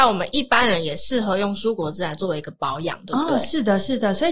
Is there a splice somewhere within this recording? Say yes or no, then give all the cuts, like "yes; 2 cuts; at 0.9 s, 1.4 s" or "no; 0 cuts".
no; 0 cuts